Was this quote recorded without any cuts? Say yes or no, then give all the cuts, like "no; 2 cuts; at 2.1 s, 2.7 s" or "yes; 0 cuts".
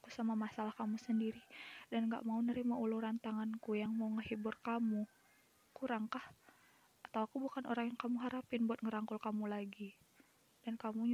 yes; 0 cuts